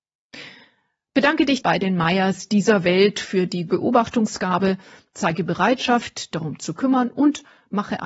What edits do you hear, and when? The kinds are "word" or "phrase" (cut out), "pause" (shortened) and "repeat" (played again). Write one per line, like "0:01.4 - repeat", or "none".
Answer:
0:01.6 - word
0:03.7 - word
0:06.3 - word